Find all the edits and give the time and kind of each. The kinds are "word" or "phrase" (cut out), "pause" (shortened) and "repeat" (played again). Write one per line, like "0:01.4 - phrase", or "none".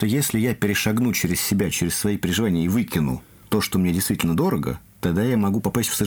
none